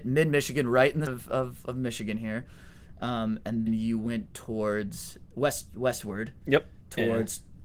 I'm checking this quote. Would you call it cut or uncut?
cut